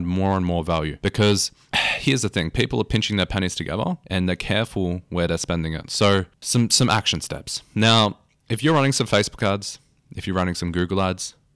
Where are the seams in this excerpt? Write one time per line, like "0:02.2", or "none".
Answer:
none